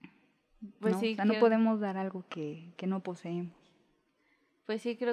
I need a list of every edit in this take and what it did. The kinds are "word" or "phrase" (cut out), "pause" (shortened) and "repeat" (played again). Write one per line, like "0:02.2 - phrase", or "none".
none